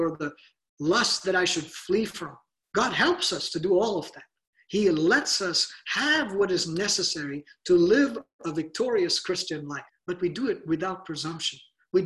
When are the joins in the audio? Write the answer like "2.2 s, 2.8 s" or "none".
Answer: 9.9 s